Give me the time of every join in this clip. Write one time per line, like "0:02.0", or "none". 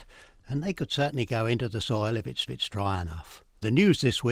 0:02.5

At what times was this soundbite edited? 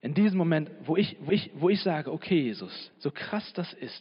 0:01.3
0:02.9

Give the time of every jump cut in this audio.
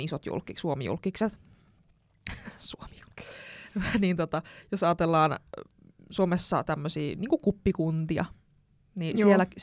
none

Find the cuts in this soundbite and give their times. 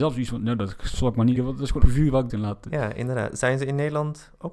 0:01.4
0:01.8
0:02.3

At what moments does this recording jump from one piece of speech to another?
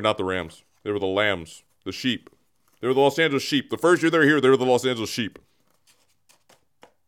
none

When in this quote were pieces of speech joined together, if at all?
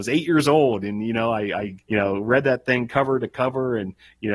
0:01.8

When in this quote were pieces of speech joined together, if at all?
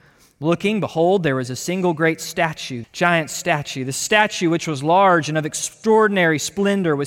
0:02.8

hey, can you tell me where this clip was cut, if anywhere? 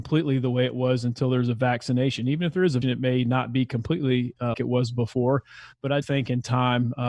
0:02.8
0:04.5
0:06.0

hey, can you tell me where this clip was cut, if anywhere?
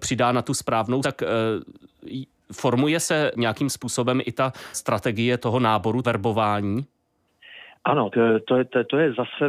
0:01.0
0:03.3
0:04.7
0:05.4
0:06.0
0:08.1

